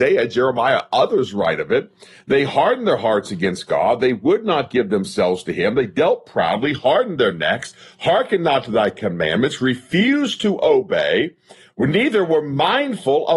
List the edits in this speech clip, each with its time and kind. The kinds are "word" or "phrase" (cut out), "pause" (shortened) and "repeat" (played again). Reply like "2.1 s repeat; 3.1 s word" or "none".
none